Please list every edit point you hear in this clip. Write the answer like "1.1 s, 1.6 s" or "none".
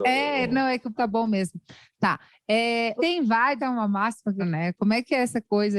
0.9 s, 3.0 s, 3.6 s, 4.4 s